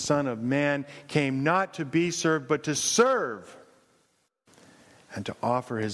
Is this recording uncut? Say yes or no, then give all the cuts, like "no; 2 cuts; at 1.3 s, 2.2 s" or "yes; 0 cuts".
yes; 0 cuts